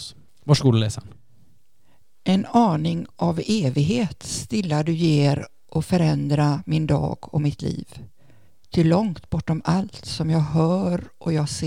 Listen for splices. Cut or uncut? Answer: uncut